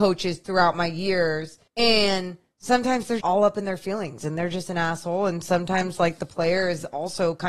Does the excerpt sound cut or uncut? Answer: cut